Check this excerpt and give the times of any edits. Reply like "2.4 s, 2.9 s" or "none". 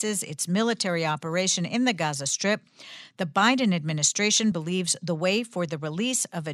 none